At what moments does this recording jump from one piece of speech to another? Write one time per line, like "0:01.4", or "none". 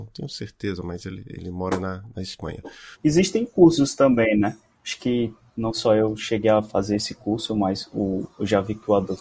0:02.9
0:04.7